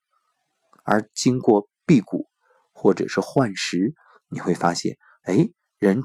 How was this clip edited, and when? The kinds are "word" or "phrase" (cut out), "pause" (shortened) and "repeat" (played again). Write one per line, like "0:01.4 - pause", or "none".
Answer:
none